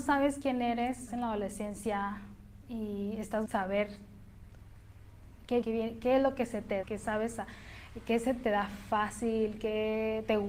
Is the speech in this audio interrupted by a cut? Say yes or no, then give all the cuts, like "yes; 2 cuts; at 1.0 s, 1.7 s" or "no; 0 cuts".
yes; 5 cuts; at 1.1 s, 2.6 s, 3.5 s, 5.6 s, 6.8 s